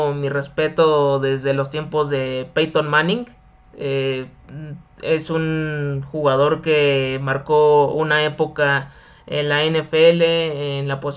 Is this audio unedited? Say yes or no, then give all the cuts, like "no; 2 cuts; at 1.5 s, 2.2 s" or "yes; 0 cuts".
yes; 0 cuts